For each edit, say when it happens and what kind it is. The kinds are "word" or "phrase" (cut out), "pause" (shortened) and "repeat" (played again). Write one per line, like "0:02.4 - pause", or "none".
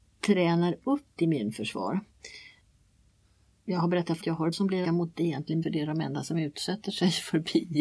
0:01.2 - word
0:04.2 - phrase
0:04.5 - phrase
0:04.8 - word
0:05.1 - word
0:05.6 - word